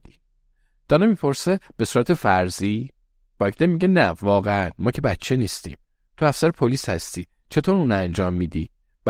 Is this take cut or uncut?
uncut